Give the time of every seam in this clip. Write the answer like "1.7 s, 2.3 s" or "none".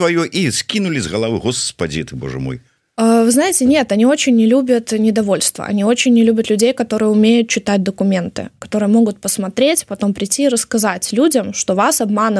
2.8 s